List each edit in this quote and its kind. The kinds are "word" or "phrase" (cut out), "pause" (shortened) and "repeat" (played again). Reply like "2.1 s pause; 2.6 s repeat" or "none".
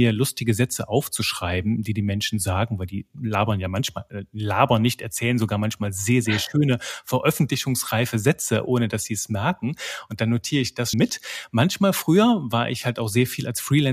10.9 s word